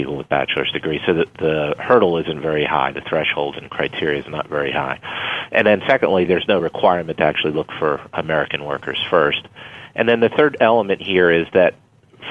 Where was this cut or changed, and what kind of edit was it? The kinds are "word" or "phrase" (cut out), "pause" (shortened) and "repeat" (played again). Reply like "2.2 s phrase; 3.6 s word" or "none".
none